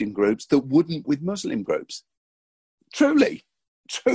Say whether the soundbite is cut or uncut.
cut